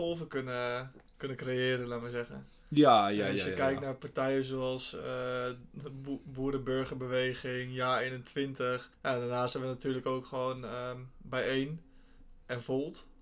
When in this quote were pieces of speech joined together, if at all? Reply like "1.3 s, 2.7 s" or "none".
1.1 s, 8.9 s